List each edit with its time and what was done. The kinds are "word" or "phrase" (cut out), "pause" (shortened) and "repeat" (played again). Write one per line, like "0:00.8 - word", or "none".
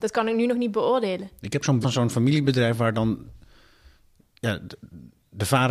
0:01.8 - word